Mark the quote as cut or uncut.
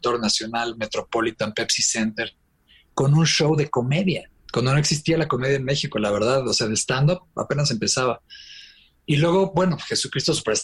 uncut